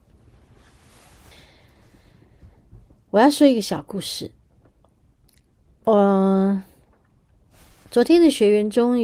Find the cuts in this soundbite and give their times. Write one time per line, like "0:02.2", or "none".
none